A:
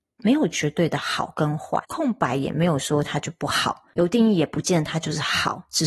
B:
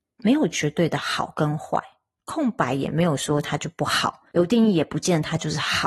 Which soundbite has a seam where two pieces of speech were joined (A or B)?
A